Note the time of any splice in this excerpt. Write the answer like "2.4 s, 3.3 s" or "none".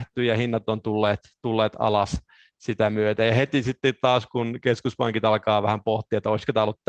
none